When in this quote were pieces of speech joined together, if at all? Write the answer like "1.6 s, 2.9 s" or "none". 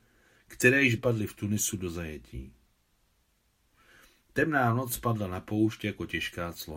1.0 s